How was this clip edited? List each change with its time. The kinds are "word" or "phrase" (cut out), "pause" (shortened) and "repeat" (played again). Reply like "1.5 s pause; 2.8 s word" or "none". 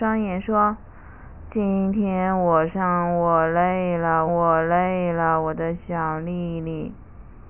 4.3 s repeat

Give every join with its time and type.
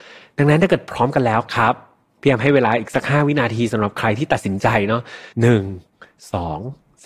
5.3 s pause

